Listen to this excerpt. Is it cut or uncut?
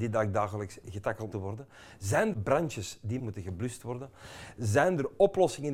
cut